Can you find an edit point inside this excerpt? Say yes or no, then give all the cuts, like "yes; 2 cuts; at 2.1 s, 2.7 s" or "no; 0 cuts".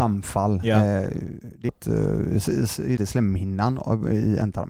yes; 2 cuts; at 1.7 s, 3.0 s